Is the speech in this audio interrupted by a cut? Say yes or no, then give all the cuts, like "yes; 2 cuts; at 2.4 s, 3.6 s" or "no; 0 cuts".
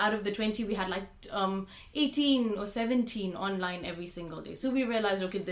no; 0 cuts